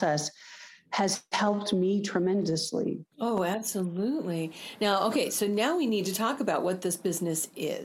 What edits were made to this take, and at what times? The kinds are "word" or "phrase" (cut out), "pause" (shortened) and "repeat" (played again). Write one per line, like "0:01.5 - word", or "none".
0:03.1 - pause